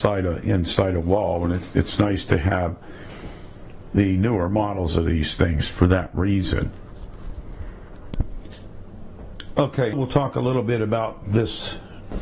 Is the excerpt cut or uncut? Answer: cut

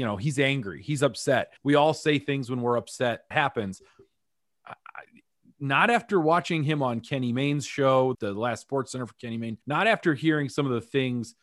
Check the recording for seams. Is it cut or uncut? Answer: cut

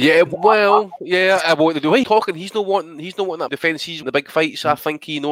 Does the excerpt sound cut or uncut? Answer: cut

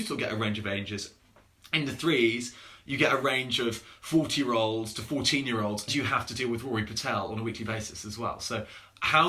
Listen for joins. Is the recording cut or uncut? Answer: cut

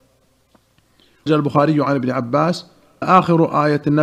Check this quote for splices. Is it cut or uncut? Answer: cut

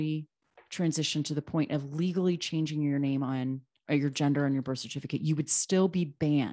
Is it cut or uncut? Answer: uncut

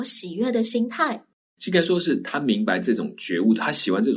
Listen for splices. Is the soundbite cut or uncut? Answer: uncut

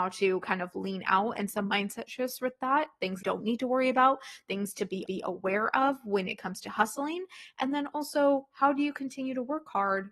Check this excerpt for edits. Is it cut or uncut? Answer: cut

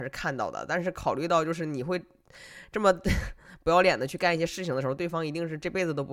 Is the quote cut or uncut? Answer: uncut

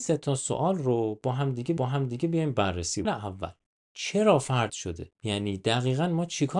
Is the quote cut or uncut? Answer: cut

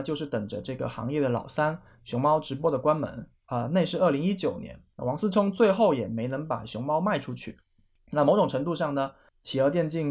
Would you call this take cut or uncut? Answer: uncut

